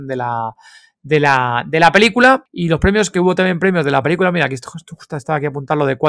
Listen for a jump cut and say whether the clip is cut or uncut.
uncut